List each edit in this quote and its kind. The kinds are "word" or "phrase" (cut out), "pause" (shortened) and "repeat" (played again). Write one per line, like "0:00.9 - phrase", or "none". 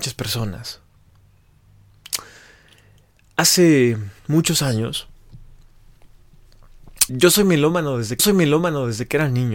0:04.2 - pause
0:07.1 - word
0:08.2 - repeat